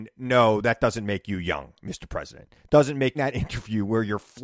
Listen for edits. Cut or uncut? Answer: cut